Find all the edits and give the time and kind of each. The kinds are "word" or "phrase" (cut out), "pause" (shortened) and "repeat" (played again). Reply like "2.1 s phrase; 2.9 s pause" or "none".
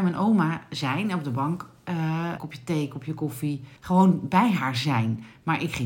2.4 s phrase; 3.8 s pause